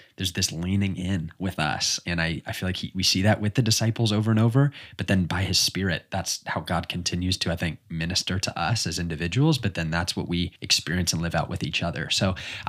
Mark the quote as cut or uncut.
cut